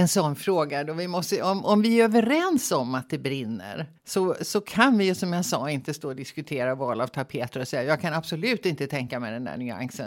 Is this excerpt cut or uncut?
cut